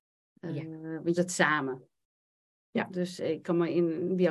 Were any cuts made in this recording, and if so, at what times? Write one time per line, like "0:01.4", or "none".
0:01.2